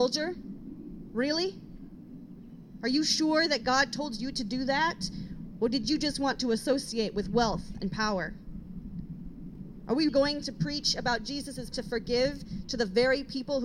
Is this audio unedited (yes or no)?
no